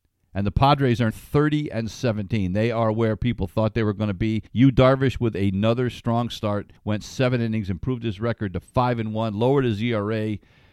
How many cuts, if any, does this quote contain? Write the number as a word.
three